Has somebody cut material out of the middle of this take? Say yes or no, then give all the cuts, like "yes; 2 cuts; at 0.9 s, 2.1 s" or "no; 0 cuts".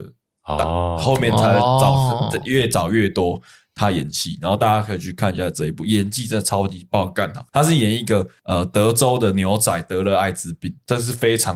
no; 0 cuts